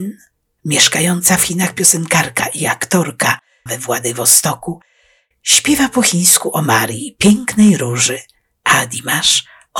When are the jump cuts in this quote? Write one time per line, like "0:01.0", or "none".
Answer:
0:03.7